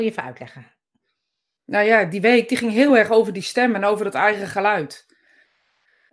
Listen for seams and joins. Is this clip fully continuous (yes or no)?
yes